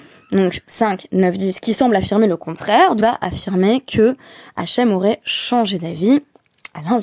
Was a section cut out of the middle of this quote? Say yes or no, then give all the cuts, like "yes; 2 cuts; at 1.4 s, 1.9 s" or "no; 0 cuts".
yes; 1 cut; at 3.0 s